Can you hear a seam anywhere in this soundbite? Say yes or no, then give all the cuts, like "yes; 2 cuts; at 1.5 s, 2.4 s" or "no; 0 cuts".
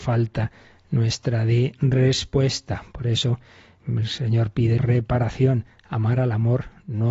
yes; 2 cuts; at 3.8 s, 4.8 s